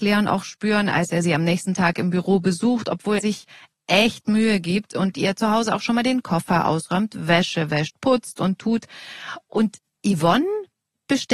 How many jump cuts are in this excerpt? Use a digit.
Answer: 1